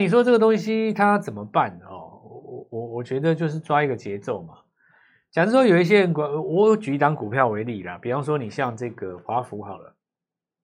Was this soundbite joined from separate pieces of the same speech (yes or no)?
no